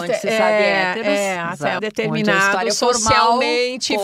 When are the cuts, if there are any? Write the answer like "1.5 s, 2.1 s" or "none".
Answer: 1.8 s